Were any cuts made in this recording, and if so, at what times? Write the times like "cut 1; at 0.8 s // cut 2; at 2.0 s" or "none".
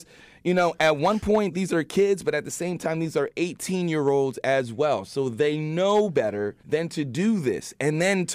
cut 1; at 6.6 s